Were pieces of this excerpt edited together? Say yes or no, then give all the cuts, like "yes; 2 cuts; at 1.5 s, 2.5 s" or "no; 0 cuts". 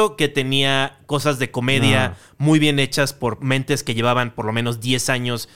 no; 0 cuts